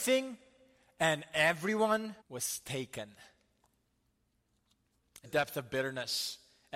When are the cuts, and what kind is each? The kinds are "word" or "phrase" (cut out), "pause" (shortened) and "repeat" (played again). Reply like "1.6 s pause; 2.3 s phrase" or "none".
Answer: 2.2 s pause; 5.2 s phrase